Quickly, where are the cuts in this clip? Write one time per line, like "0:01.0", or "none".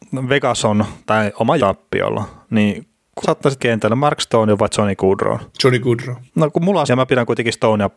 0:01.6
0:03.2
0:03.6
0:05.5
0:06.3
0:06.9

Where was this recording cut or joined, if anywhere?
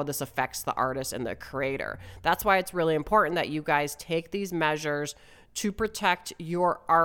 none

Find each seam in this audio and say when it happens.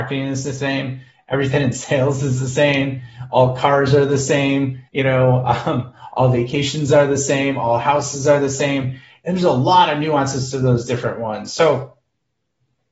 0:04.9

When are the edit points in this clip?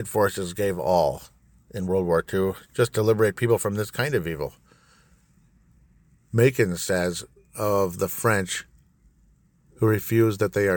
none

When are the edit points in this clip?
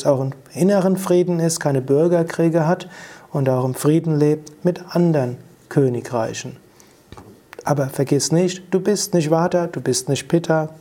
none

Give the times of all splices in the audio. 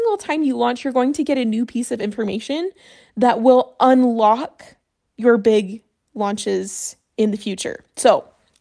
none

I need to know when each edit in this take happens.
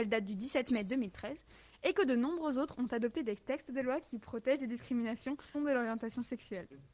0:05.5

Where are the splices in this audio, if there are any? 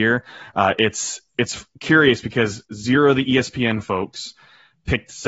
0:01.7
0:02.6

